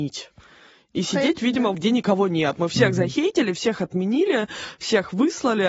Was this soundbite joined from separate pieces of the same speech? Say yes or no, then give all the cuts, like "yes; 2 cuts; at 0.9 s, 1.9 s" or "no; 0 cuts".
yes; 1 cut; at 1.7 s